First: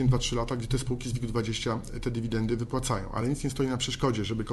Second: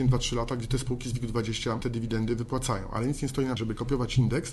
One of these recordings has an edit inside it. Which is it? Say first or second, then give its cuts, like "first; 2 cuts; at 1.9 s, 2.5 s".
second; 2 cuts; at 1.8 s, 3.6 s